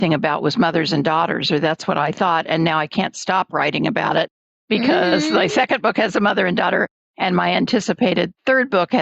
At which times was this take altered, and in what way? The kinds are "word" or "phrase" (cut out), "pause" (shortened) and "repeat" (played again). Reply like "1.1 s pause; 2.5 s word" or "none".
none